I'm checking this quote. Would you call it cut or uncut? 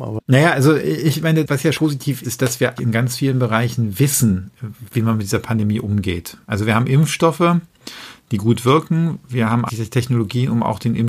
cut